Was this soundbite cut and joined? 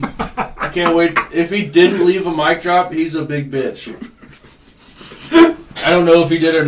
no; 0 cuts

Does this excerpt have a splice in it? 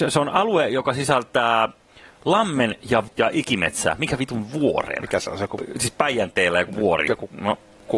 yes; 1 cut; at 3.1 s

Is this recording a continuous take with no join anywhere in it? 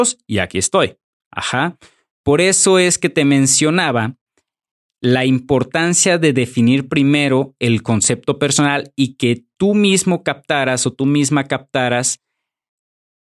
yes; 0 cuts

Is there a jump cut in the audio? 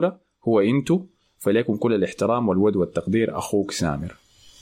no; 0 cuts

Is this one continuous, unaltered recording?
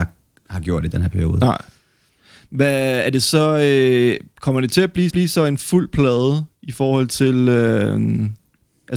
no; 2 cuts; at 5.1 s, 6.5 s

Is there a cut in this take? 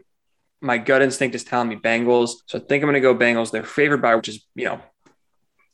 yes; 3 cuts; at 2.4 s, 4.2 s, 4.5 s

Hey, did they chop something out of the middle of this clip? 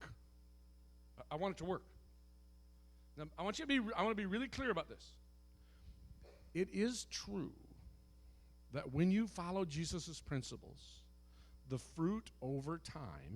no; 0 cuts

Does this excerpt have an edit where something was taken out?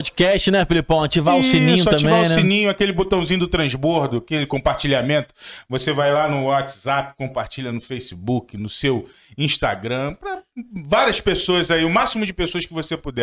no; 0 cuts

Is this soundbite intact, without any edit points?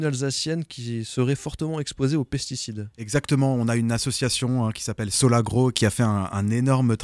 yes; 0 cuts

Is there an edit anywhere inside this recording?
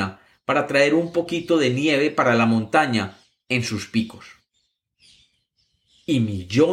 no; 0 cuts

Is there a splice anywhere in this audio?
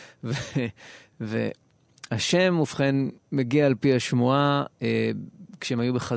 yes; 1 cut; at 3.2 s

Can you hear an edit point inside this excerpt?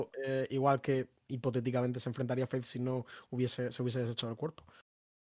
no; 0 cuts

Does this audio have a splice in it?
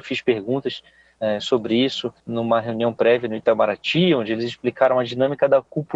yes; 1 cut; at 2.2 s

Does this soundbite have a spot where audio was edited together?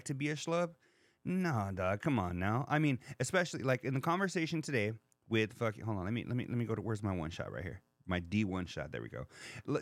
no; 0 cuts

